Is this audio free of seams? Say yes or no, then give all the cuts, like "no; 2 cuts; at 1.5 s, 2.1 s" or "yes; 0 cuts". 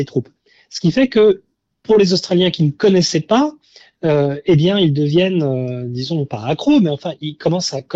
yes; 0 cuts